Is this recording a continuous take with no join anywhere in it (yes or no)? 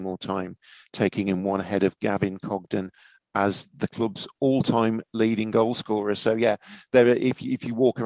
yes